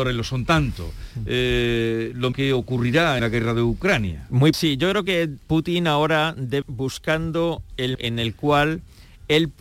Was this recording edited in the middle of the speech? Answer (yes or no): yes